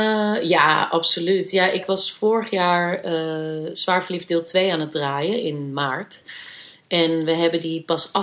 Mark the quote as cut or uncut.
uncut